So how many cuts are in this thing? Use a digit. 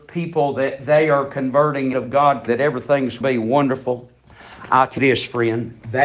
4